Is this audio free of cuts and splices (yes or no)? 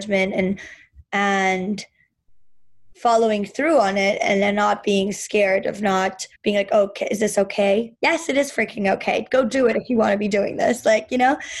no